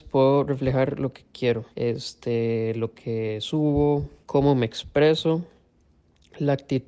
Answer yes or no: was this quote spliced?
yes